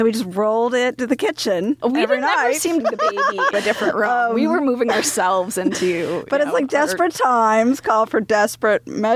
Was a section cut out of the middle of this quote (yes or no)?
yes